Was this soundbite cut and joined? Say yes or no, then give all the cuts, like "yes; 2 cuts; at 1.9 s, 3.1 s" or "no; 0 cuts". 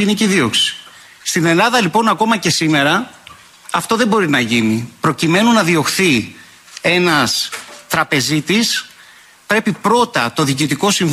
no; 0 cuts